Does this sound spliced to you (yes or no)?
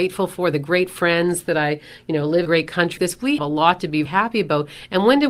yes